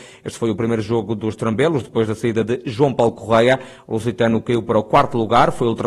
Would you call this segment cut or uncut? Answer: uncut